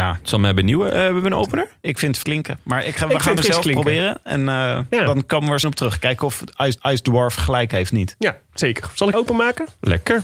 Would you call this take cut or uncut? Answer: cut